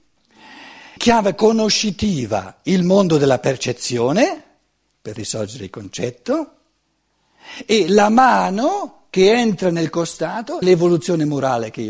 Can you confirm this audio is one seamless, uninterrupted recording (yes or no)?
no